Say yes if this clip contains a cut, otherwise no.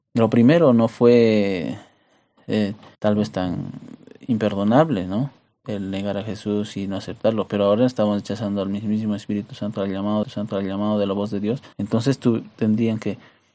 yes